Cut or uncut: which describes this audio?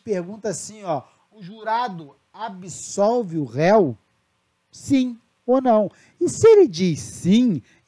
uncut